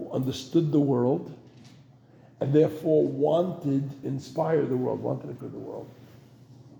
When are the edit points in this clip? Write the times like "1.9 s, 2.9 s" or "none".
4.0 s, 5.4 s